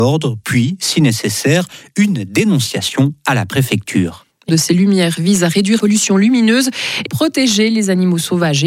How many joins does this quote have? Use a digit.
3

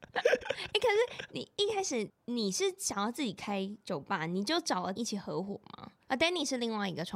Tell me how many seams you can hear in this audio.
1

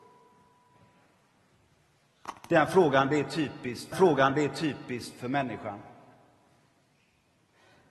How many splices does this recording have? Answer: 1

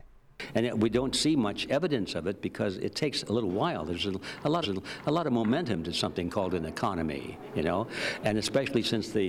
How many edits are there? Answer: 1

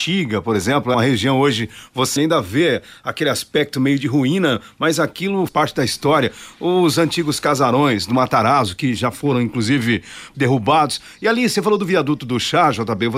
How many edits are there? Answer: 4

